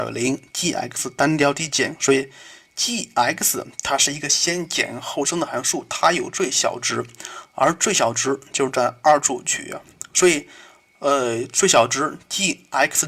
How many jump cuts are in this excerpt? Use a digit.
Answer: 0